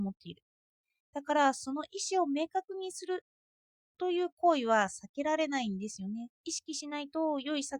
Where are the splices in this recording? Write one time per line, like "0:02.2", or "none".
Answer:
0:06.3